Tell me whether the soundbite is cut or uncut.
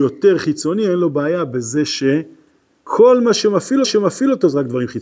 cut